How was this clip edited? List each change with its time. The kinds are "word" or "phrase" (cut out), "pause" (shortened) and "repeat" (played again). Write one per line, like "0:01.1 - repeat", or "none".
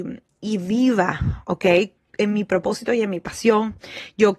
none